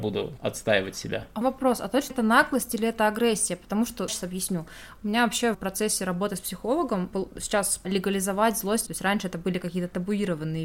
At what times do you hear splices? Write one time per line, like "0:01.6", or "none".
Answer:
0:01.4
0:02.1
0:04.1
0:05.5
0:07.1
0:07.8
0:08.9